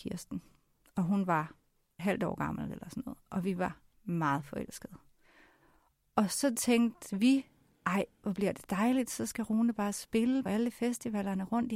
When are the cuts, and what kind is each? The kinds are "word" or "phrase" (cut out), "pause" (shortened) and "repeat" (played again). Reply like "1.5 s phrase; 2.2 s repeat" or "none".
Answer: 2.0 s word; 3.9 s pause; 10.5 s word